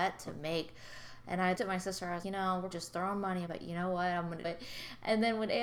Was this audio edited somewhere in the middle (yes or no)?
yes